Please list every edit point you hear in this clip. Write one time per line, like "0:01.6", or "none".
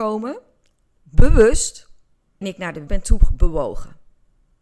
0:02.4
0:02.9